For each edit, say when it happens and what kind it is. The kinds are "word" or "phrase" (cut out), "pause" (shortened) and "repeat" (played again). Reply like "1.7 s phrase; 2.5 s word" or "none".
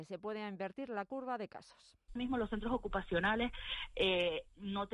2.2 s word